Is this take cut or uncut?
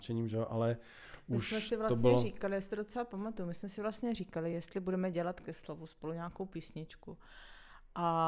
uncut